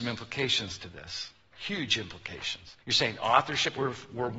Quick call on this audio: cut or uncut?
cut